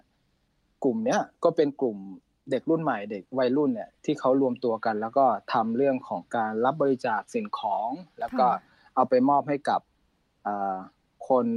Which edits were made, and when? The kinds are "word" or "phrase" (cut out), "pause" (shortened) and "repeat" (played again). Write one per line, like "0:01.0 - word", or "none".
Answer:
0:03.3 - pause